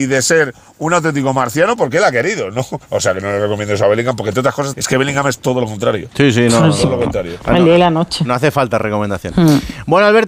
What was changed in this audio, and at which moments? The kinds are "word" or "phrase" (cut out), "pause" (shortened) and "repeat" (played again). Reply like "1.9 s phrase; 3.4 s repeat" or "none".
2.8 s pause; 4.7 s phrase